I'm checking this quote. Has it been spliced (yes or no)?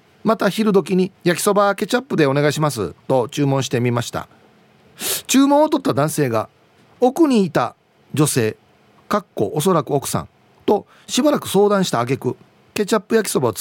yes